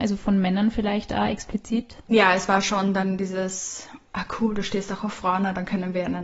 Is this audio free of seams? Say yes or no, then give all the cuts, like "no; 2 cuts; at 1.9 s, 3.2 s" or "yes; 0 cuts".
yes; 0 cuts